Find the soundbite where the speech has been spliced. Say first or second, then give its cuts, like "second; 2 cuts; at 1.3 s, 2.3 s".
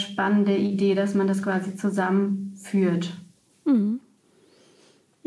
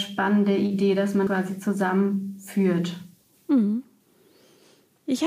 second; 1 cut; at 1.3 s